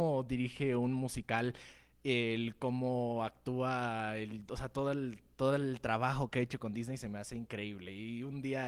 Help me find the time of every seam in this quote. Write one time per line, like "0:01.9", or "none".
none